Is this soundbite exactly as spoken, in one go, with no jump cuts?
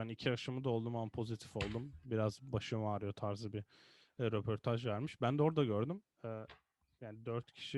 yes; 0 cuts

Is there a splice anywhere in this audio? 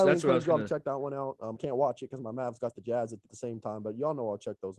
yes; 2 cuts; at 1.5 s, 3.3 s

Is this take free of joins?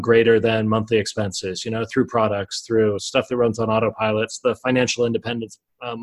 yes; 0 cuts

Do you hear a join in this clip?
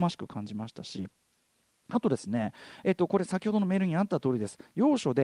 no; 0 cuts

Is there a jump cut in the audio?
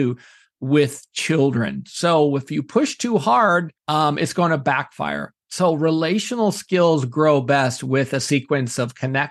yes; 2 cuts; at 3.8 s, 5.4 s

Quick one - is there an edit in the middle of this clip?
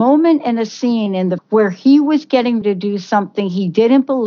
yes; 2 cuts; at 1.4 s, 2.6 s

